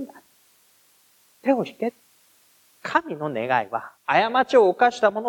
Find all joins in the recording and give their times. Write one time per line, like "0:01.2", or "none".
0:02.1
0:04.0